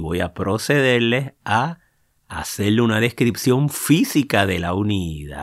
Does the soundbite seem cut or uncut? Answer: uncut